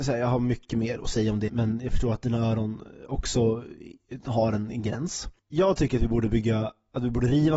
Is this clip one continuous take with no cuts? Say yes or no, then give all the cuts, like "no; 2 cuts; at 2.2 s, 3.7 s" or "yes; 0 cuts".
no; 2 cuts; at 1.5 s, 5.4 s